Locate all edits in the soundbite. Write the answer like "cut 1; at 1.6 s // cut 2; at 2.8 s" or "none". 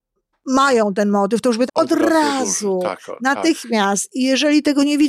cut 1; at 1.7 s